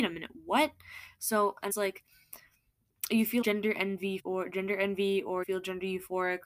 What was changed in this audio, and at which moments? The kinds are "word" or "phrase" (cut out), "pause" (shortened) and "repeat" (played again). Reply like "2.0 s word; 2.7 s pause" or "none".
1.7 s phrase; 3.4 s word; 4.2 s word; 5.4 s word